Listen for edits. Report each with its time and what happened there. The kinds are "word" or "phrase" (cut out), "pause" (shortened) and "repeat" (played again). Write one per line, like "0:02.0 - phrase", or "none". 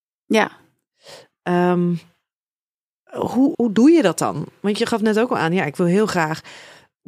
0:03.5 - word